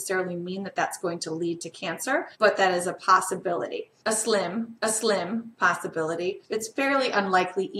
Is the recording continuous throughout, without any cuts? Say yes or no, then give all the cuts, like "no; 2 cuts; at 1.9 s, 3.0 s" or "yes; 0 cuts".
no; 2 cuts; at 2.3 s, 4.8 s